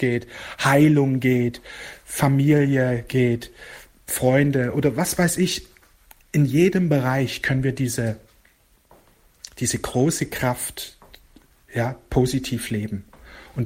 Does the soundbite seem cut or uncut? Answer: uncut